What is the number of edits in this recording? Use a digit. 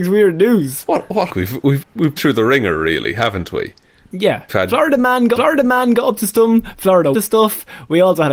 6